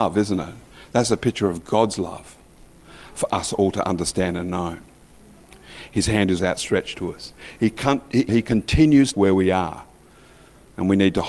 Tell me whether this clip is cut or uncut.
cut